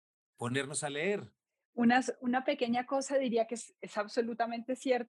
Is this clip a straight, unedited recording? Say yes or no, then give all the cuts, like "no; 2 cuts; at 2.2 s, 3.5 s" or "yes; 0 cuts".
yes; 0 cuts